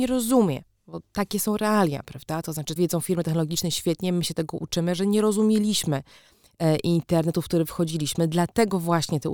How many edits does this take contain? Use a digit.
1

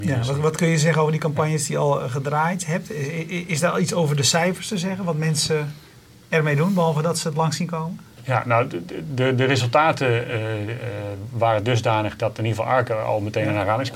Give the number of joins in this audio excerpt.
0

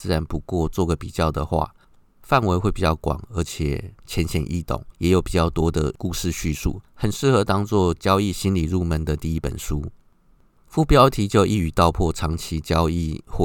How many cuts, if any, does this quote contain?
0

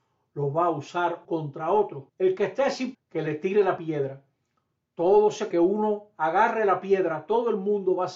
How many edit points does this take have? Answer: 5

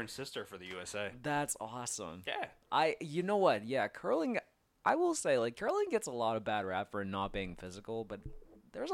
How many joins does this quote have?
0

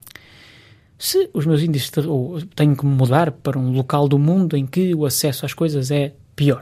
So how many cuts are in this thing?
0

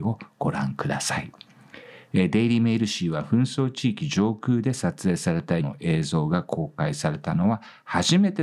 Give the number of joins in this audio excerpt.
1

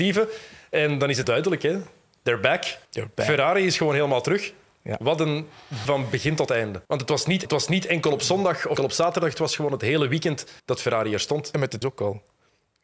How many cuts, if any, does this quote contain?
8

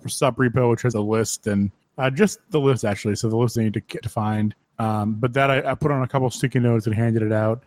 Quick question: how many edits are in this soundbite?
3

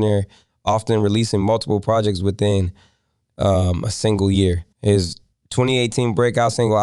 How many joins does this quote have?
1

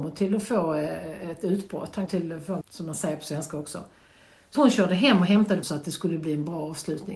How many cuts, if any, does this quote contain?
4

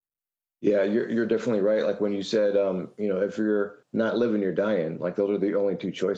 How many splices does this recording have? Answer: 1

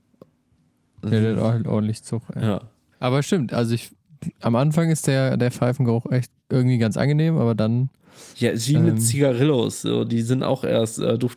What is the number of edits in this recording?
3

